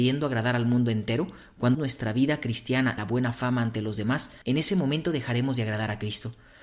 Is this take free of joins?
no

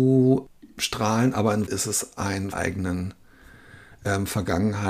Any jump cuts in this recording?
yes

